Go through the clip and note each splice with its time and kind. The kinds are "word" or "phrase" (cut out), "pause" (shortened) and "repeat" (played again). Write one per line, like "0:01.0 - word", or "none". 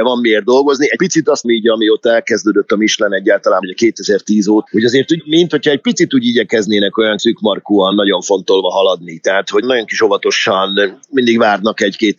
0:01.4 - word
0:03.6 - word
0:04.7 - word
0:07.2 - word
0:07.9 - word
0:09.6 - word